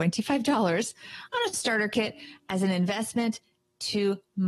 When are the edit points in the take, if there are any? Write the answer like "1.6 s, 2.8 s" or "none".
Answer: none